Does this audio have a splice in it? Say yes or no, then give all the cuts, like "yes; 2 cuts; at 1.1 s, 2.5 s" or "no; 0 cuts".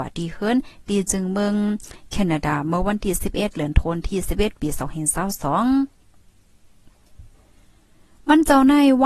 no; 0 cuts